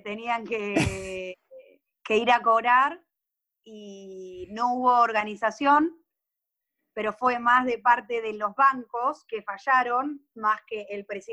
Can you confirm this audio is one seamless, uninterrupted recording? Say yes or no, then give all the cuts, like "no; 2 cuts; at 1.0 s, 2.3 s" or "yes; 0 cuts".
yes; 0 cuts